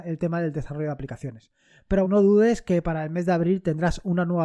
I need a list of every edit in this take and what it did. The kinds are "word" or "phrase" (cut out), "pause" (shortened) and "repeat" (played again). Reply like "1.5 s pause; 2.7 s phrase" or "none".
2.0 s word